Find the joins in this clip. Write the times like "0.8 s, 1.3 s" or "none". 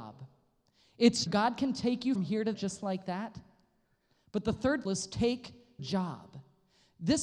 1.3 s, 2.2 s, 2.5 s, 4.9 s, 5.8 s

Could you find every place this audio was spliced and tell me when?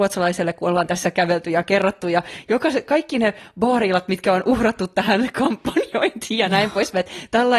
none

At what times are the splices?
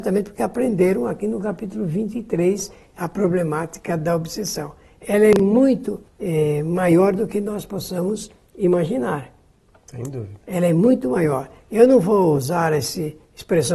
6.1 s

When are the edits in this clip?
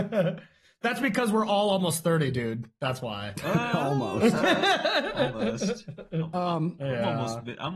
none

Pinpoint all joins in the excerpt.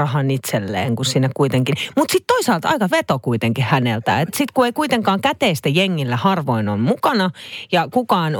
2.9 s, 4.3 s

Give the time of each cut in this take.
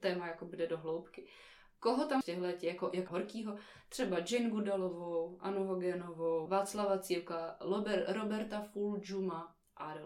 2.2 s, 3.1 s, 6.5 s

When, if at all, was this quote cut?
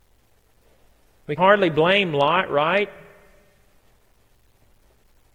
1.4 s

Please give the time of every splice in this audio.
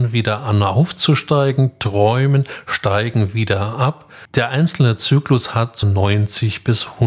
5.8 s

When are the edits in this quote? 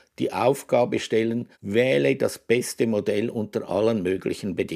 1.5 s

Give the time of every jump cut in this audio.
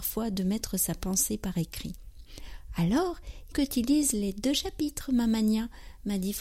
3.5 s

